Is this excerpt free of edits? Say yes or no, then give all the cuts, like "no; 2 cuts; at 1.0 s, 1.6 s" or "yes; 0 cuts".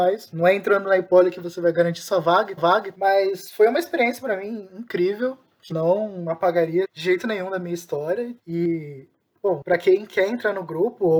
no; 4 cuts; at 2.6 s, 5.7 s, 6.8 s, 8.4 s